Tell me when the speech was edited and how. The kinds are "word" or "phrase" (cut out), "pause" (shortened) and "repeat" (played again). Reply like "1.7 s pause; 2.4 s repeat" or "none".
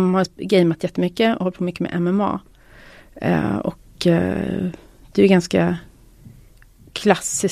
none